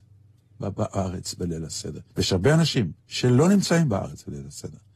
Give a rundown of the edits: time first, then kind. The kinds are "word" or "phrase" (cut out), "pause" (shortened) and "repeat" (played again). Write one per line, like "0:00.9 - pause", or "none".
0:02.1 - pause
0:03.0 - pause